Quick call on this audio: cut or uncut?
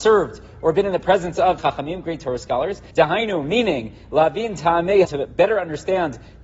cut